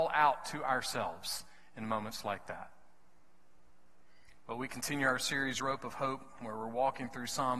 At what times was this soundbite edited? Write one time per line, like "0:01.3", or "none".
none